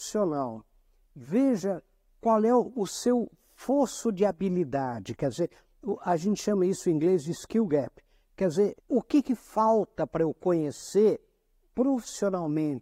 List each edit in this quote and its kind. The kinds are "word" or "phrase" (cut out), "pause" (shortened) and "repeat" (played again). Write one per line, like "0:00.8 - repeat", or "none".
0:08.8 - pause